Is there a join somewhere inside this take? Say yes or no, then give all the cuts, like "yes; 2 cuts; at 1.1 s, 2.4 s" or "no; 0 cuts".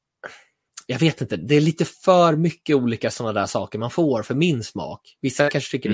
no; 0 cuts